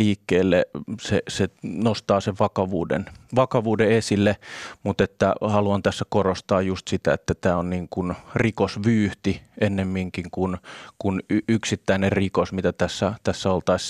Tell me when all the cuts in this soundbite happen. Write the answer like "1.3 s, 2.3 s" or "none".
none